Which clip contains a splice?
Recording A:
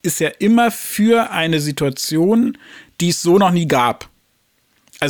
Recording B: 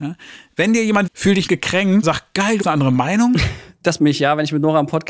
B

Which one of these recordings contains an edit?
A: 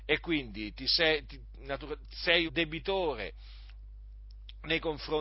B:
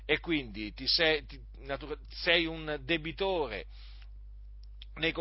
A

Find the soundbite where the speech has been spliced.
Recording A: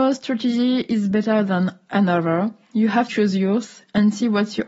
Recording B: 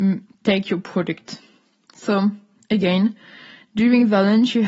A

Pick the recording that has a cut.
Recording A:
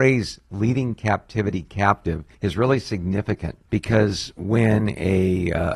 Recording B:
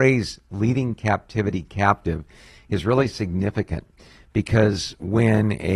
A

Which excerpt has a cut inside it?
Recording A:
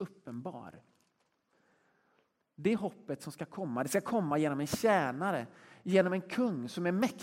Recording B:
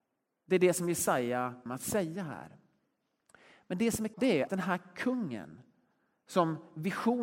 B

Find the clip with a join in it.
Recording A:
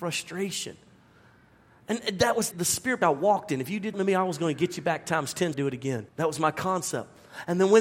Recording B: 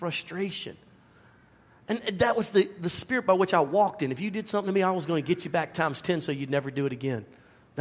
A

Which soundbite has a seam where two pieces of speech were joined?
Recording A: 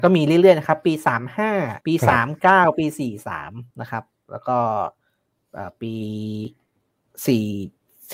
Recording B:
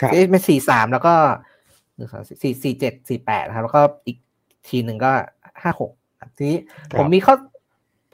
A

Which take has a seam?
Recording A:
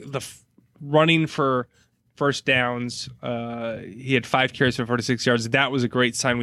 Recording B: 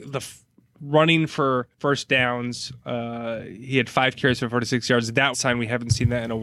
B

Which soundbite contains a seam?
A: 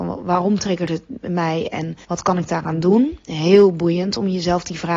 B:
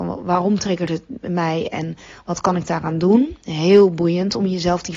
A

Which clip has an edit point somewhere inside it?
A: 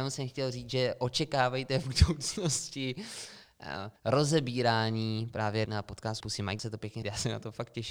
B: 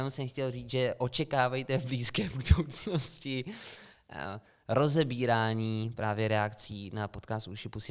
A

